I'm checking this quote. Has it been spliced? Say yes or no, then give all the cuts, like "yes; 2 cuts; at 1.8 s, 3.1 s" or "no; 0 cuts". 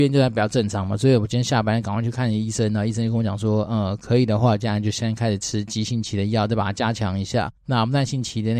yes; 1 cut; at 7.6 s